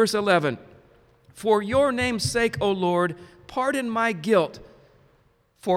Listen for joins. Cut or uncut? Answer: uncut